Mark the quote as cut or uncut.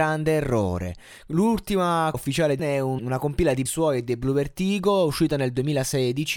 cut